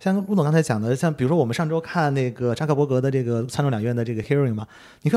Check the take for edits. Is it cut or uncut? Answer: uncut